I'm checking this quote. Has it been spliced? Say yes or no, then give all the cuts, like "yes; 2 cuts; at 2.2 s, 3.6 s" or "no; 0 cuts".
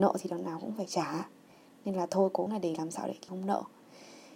yes; 2 cuts; at 2.5 s, 3.3 s